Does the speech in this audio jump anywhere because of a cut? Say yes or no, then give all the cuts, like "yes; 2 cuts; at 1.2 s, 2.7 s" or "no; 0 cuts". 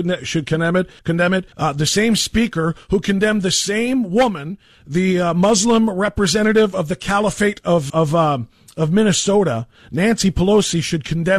yes; 3 cuts; at 1.0 s, 1.5 s, 7.9 s